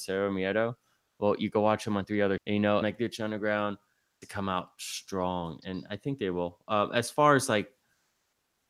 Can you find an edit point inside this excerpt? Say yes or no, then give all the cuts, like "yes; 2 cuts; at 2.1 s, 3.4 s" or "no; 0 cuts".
yes; 3 cuts; at 2.4 s, 2.8 s, 4.2 s